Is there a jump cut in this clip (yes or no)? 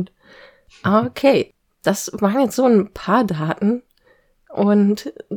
no